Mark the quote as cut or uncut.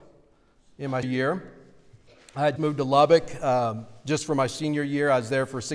cut